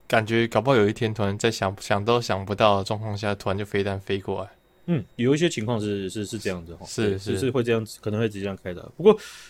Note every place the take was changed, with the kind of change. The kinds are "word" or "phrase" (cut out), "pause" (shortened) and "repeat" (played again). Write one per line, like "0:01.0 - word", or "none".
0:05.1 - pause